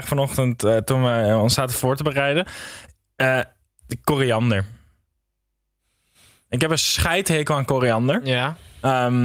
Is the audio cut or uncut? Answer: uncut